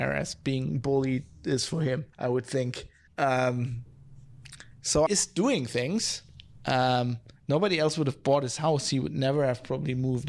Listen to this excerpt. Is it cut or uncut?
cut